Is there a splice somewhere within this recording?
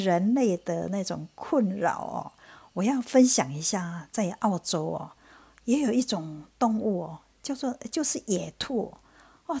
no; 0 cuts

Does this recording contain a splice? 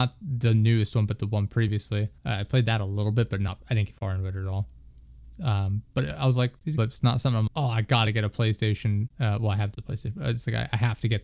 yes; 5 cuts; at 2.2 s, 3.9 s, 6.8 s, 7.5 s, 9.1 s

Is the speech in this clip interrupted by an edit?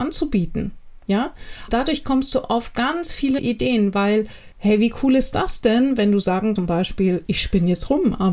yes; 5 cuts; at 1.7 s, 3.4 s, 4.5 s, 6.6 s, 7.3 s

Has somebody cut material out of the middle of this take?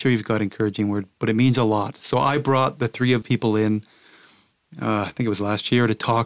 yes; 1 cut; at 3.2 s

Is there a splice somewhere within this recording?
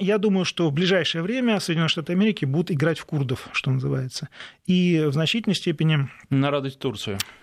no; 0 cuts

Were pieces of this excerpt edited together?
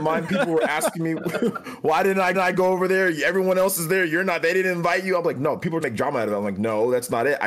yes; 2 cuts; at 2.3 s, 5.8 s

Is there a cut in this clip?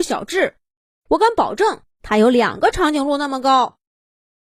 yes; 1 cut; at 1.9 s

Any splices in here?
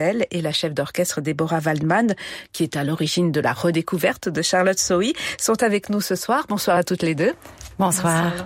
no; 0 cuts

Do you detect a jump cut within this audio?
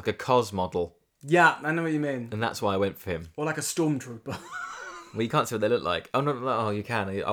no; 0 cuts

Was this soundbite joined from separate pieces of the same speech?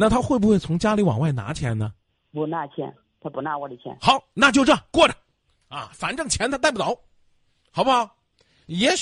no; 0 cuts

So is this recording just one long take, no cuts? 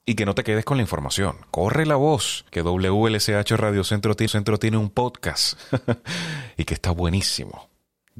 no; 2 cuts; at 2.5 s, 4.3 s

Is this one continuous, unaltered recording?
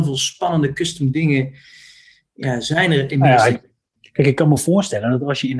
yes; 0 cuts

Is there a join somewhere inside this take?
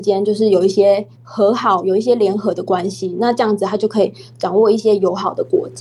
yes; 1 cut; at 1.1 s

